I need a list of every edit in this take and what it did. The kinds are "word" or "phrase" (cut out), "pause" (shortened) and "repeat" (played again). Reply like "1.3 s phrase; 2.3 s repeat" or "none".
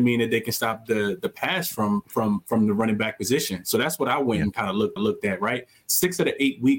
5.0 s repeat